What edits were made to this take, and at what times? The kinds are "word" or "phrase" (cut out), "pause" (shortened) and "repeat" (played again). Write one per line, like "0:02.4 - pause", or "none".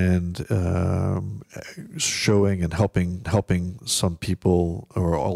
0:03.2 - repeat